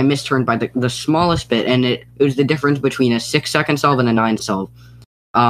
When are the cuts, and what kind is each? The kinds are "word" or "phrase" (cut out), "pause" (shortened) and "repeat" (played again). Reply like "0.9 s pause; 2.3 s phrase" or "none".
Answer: 2.1 s pause; 4.4 s word